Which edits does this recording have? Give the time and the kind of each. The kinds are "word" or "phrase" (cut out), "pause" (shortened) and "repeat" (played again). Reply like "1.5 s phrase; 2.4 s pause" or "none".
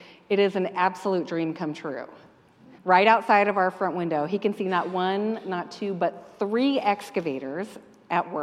2.8 s pause